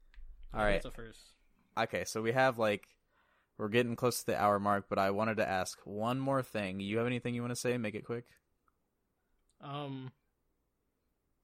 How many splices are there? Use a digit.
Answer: 0